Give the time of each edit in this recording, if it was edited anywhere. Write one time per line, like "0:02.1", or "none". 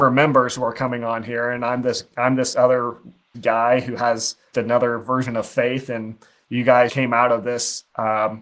0:03.3
0:04.5
0:06.9